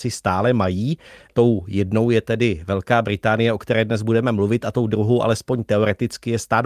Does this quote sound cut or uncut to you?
uncut